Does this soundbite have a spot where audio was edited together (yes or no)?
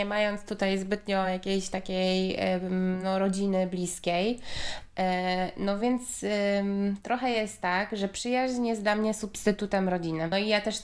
no